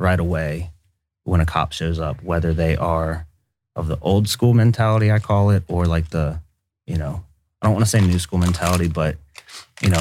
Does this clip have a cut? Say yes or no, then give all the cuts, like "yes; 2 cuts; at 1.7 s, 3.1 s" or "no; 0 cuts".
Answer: no; 0 cuts